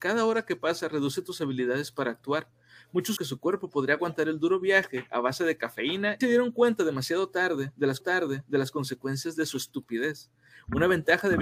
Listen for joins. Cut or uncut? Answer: cut